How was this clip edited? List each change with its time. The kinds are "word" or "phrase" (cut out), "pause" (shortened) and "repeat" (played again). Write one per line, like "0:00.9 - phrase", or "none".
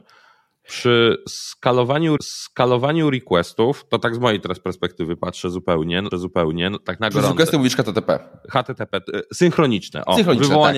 0:02.2 - repeat
0:06.1 - repeat